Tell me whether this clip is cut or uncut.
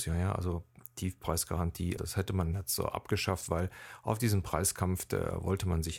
cut